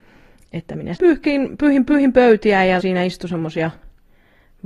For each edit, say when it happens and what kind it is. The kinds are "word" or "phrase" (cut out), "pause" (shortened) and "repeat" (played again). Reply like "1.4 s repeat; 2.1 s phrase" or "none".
1.0 s word; 1.9 s repeat; 2.8 s word